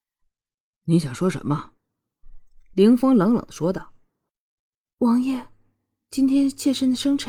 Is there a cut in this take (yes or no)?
no